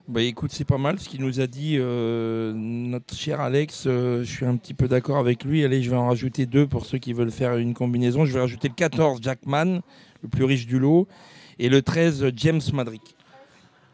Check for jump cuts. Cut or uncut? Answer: uncut